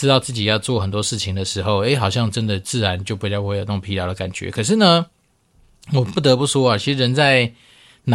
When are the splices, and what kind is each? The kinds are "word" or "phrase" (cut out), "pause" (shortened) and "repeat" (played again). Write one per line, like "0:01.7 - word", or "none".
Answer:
none